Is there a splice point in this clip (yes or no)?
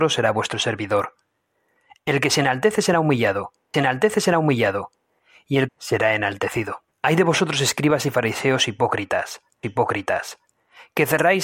yes